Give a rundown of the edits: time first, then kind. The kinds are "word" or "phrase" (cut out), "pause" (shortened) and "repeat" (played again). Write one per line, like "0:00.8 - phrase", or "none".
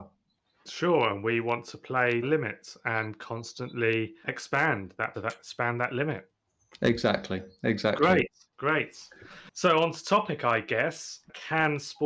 0:02.2 - phrase
0:05.1 - word

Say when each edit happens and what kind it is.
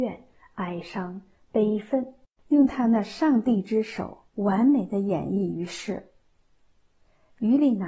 0:02.2 - pause
0:04.3 - pause

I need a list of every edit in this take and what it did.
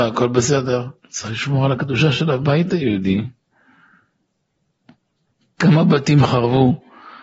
0:01.0 - pause

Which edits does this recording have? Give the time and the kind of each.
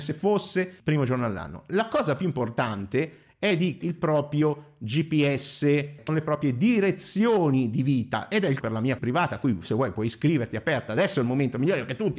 0:03.8 - word
0:06.1 - word
0:08.6 - phrase
0:09.0 - word

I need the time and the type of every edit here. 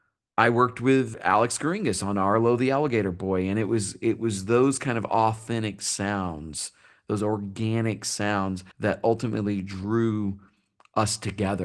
0:08.7 - pause

